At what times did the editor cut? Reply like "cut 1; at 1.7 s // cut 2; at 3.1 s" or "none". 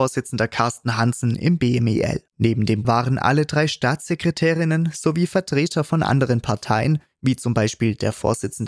cut 1; at 2.3 s // cut 2; at 2.8 s